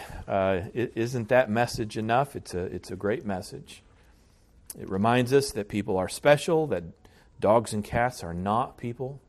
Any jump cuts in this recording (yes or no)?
no